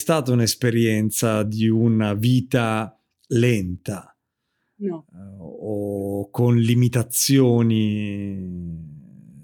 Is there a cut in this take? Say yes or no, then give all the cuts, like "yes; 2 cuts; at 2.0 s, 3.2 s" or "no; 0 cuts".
no; 0 cuts